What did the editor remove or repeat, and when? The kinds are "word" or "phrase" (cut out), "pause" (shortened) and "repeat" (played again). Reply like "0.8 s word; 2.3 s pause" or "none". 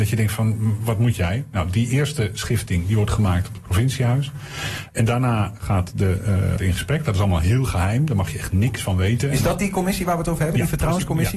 6.6 s phrase